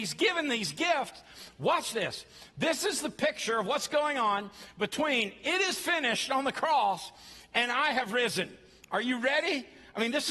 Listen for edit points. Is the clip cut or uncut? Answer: uncut